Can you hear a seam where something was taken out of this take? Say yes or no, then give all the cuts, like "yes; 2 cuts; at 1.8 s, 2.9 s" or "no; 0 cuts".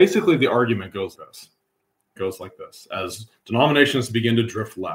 yes; 2 cuts; at 1.1 s, 2.2 s